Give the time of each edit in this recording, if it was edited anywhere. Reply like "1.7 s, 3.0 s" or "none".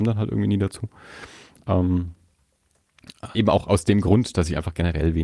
3.3 s